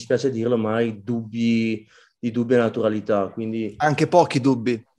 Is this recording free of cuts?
yes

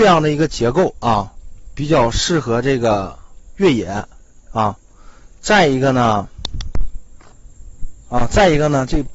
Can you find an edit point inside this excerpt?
yes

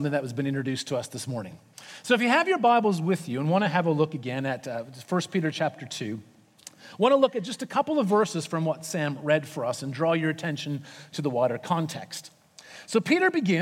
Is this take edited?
no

